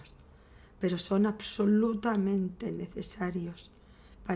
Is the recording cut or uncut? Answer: uncut